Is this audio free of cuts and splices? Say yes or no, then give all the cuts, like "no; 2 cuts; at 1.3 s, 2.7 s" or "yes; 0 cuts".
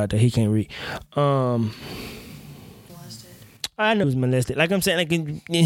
no; 2 cuts; at 2.9 s, 4.0 s